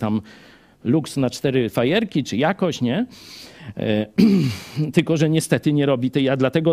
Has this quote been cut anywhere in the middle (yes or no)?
no